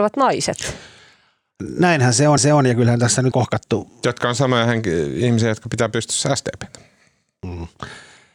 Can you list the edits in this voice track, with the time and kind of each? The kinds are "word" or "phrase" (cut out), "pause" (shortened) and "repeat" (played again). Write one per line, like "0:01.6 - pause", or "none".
0:02.4 - repeat
0:03.3 - phrase